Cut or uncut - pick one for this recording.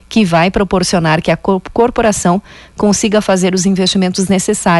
uncut